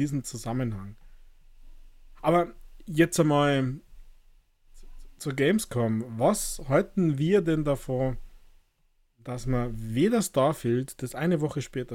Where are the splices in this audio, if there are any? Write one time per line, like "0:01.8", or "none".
none